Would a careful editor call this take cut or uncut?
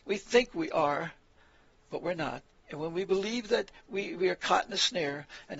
uncut